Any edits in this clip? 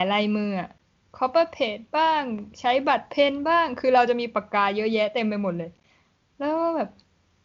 no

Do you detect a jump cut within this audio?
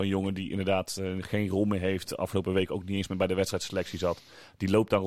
no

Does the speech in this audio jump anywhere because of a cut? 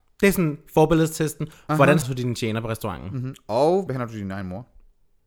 yes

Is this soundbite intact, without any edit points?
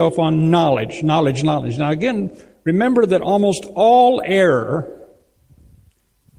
yes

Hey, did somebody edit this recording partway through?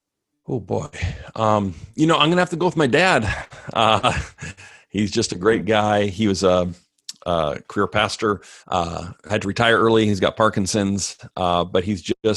yes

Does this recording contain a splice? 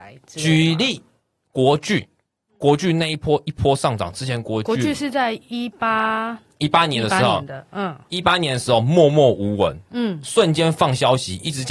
no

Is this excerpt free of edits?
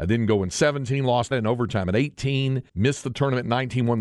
no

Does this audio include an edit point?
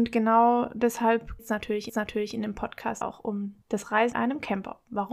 yes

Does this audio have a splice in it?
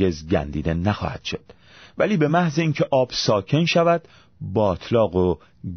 no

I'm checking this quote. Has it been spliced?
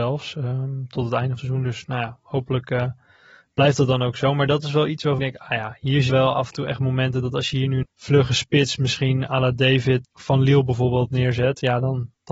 yes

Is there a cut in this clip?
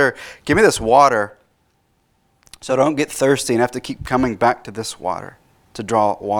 no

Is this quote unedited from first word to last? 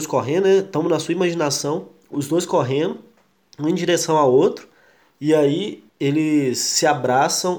no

